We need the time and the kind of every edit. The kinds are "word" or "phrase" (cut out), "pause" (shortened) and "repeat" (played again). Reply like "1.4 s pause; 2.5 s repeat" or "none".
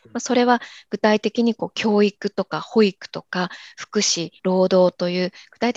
4.4 s pause